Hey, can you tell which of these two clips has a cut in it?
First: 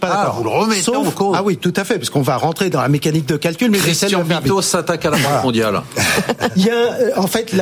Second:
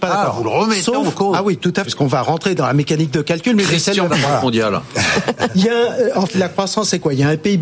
second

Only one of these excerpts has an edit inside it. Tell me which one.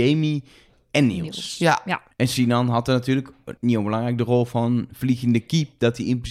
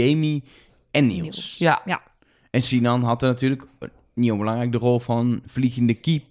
first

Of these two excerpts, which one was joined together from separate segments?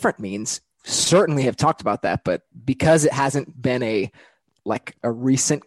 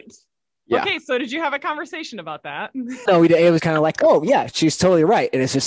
second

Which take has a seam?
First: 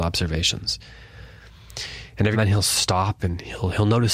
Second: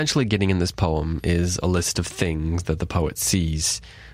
first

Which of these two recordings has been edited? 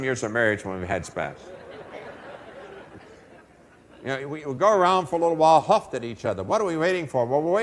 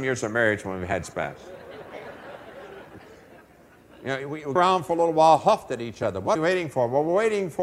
second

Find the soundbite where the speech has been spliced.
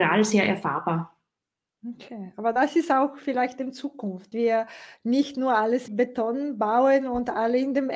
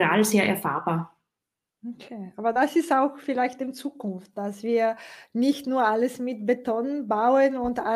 first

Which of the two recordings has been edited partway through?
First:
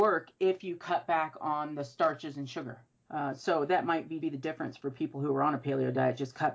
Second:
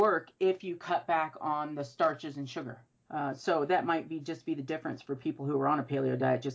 first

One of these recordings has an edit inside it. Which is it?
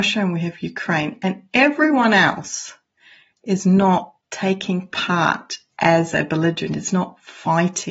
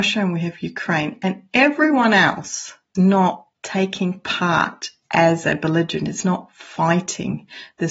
second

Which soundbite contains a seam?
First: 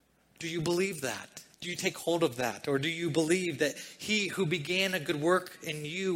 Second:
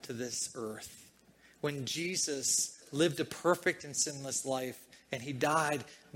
first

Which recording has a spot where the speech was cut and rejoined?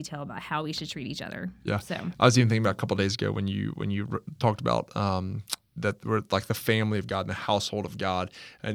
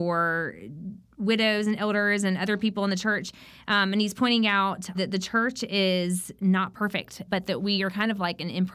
second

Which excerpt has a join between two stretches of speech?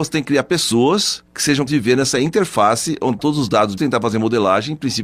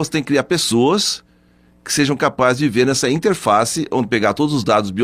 first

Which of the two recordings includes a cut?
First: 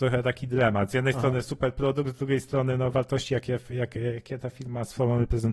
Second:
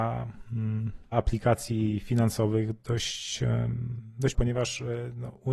second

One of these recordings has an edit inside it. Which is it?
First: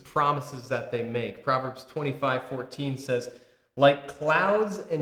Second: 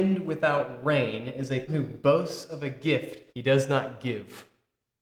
second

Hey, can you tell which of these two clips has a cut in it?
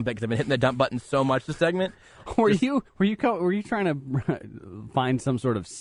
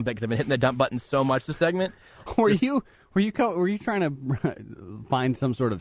first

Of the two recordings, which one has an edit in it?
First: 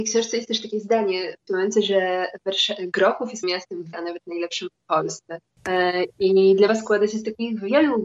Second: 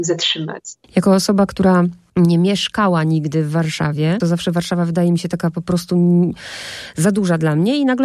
first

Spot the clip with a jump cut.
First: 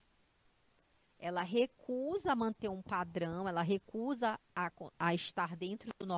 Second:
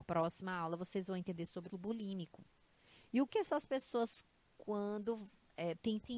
second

